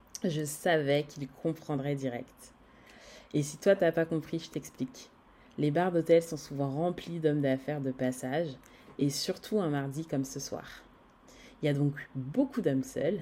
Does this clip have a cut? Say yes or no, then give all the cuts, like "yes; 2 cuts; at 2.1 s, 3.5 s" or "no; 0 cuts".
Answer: no; 0 cuts